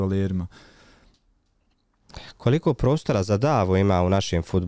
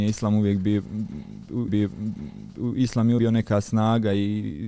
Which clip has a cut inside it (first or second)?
second